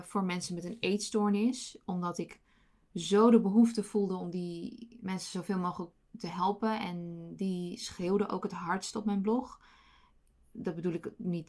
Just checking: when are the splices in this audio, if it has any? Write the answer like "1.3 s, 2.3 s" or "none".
none